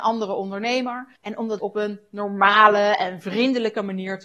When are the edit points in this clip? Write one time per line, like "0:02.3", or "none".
0:01.2
0:01.6